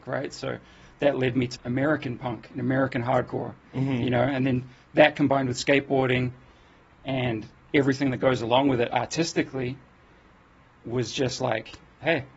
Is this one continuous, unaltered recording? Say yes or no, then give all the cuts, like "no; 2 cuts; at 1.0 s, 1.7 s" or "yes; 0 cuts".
no; 1 cut; at 1.5 s